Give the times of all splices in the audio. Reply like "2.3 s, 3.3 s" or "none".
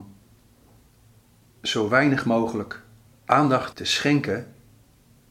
3.7 s